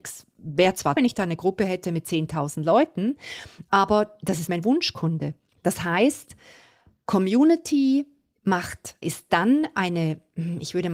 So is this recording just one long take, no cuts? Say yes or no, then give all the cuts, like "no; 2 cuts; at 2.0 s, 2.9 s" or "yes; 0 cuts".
no; 3 cuts; at 1.0 s, 4.5 s, 9.0 s